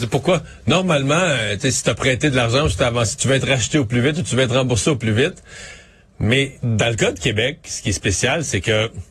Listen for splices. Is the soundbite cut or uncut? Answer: uncut